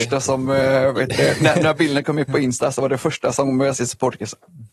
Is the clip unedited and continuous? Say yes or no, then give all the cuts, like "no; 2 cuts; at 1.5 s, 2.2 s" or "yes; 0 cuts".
no; 1 cut; at 3.7 s